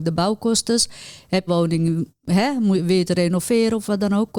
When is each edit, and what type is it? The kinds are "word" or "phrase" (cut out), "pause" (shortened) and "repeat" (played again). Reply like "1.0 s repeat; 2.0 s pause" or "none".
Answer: 1.5 s phrase